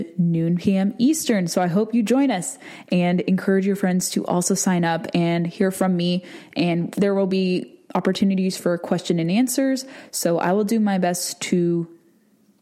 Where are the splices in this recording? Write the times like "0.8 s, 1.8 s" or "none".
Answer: none